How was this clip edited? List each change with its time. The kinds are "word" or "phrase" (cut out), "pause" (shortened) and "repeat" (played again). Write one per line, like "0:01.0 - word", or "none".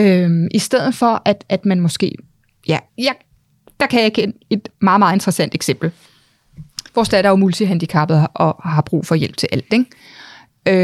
0:02.9 - pause
0:06.9 - pause